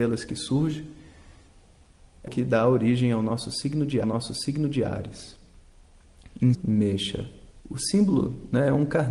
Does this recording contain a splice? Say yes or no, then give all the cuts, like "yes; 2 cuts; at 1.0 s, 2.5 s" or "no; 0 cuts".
yes; 4 cuts; at 2.3 s, 4.0 s, 6.5 s, 7.6 s